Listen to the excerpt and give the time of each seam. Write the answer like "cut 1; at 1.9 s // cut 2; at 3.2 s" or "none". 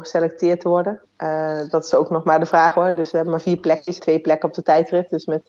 cut 1; at 4.0 s